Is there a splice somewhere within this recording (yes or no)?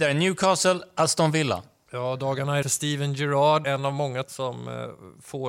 yes